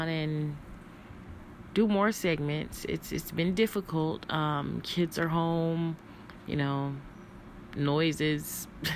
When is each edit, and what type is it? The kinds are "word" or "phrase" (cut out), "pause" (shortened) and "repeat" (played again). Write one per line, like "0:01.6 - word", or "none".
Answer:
none

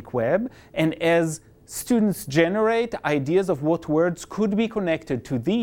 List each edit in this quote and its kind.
none

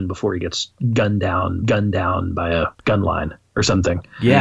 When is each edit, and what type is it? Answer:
0:01.6 - repeat
0:02.7 - pause

